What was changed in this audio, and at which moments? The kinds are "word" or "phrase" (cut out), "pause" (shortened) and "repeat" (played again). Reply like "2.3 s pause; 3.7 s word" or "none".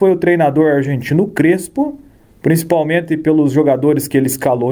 none

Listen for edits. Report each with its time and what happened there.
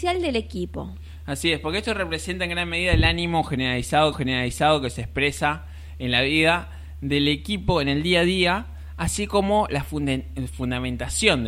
4.1 s repeat

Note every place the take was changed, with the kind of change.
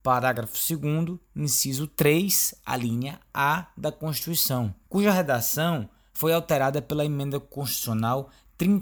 4.8 s pause

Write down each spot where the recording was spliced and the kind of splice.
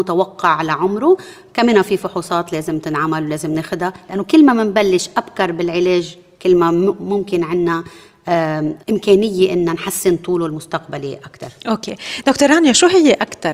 8.8 s pause

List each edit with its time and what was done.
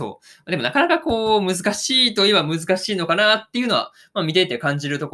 none

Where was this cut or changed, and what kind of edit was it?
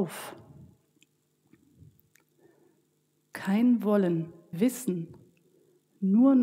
4.5 s word

